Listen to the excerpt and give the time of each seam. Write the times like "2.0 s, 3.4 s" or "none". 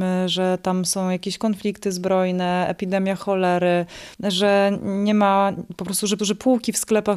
4.1 s, 6.2 s